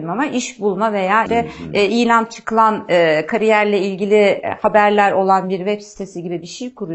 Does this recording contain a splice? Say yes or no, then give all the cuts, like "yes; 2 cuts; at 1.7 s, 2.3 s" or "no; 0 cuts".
yes; 1 cut; at 1.3 s